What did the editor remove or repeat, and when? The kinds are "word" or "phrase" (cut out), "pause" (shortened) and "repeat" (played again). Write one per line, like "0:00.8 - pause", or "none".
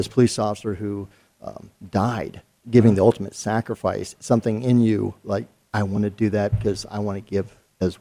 none